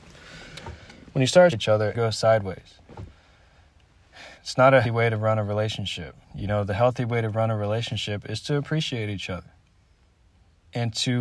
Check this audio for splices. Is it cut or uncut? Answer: cut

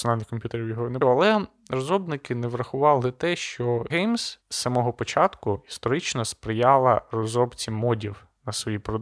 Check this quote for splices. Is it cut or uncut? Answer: cut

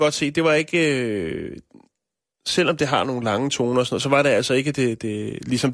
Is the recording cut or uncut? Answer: uncut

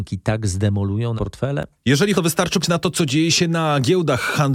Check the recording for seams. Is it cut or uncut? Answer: cut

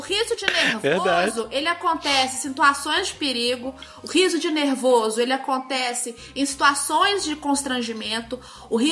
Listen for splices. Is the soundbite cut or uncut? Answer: uncut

